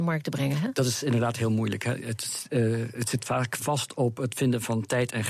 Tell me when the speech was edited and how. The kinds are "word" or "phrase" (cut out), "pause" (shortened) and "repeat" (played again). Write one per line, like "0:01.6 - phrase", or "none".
none

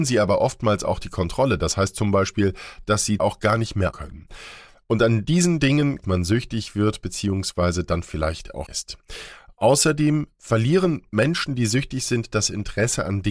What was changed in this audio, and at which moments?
0:03.2 - phrase
0:03.9 - word
0:06.0 - phrase
0:08.7 - word

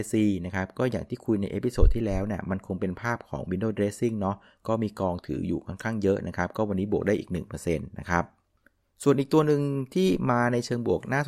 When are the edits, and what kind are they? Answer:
none

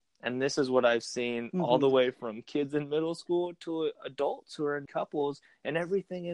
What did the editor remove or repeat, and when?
0:04.9 - word

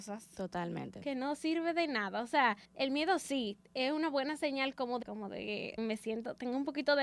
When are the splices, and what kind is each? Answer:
0:02.6 - pause
0:05.0 - word
0:05.8 - word

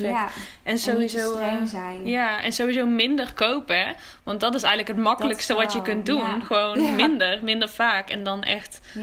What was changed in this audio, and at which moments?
none

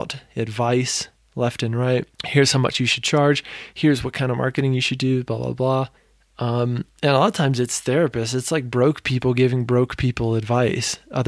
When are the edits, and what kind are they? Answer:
0:02.1 - pause
0:06.0 - pause

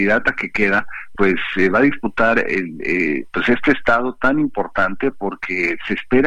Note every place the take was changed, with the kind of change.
0:01.2 - word

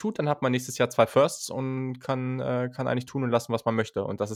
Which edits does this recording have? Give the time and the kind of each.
none

